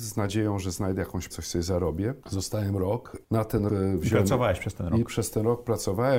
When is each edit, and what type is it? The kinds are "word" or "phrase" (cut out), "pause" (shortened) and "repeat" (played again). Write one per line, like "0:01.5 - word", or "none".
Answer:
0:01.3 - word
0:03.7 - word